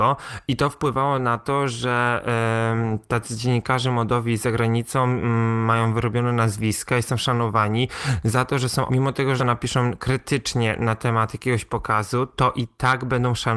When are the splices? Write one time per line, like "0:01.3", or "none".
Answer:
0:08.9
0:09.4

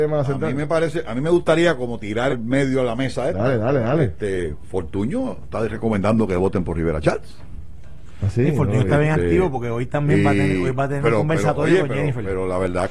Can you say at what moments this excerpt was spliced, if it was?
0:02.3

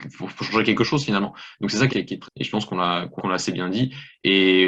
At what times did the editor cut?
0:01.9
0:02.2
0:03.2

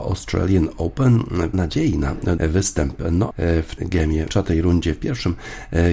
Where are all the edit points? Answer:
0:01.5
0:02.4
0:03.3
0:03.8
0:04.3

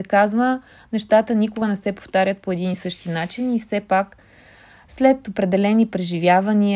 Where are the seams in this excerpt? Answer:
none

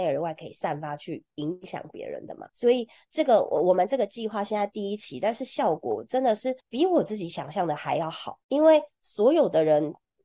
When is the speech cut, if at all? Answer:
0:02.5
0:06.6
0:08.4

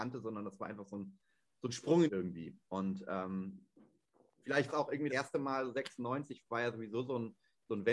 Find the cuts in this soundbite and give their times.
0:02.1
0:04.7
0:05.1

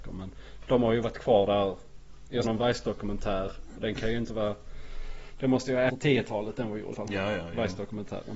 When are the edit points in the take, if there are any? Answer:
0:02.4
0:05.9
0:06.9

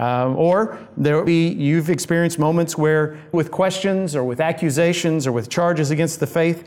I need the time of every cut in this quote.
0:01.3
0:03.3

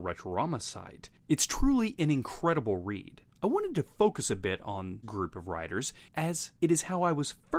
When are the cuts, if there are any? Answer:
0:05.0

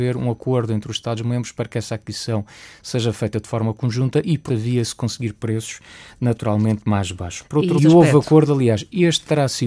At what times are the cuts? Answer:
0:04.5
0:07.8

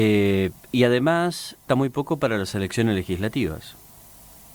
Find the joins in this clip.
0:01.7

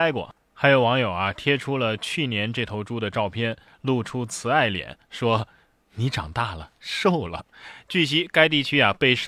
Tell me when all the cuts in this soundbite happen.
0:07.5

